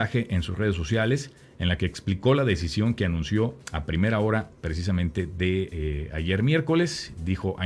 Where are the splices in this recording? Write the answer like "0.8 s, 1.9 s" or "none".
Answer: 3.6 s